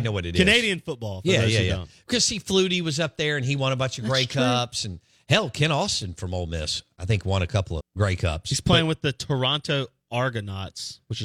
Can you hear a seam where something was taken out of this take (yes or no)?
yes